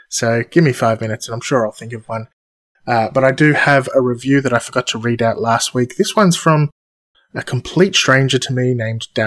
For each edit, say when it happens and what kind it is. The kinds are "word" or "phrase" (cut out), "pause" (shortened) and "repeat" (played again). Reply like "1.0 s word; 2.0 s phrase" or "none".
none

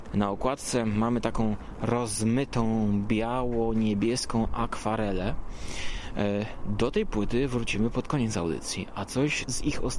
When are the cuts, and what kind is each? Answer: 9.1 s word

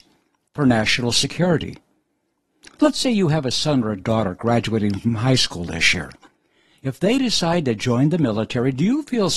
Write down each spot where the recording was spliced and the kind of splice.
none

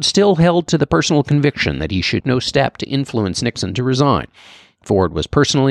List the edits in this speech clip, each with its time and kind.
2.2 s word

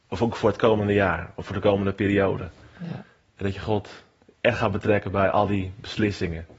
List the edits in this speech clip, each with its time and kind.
none

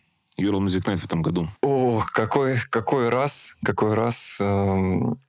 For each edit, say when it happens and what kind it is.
1.6 s pause

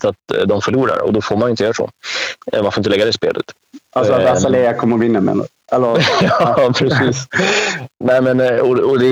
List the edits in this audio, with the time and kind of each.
8.0 s word

